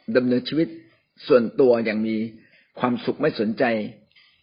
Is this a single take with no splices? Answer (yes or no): yes